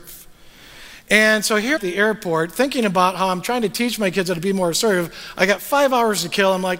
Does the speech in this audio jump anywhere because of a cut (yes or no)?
yes